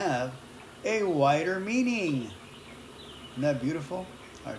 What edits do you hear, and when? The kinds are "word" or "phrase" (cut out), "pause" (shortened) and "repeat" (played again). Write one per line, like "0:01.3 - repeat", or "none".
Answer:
none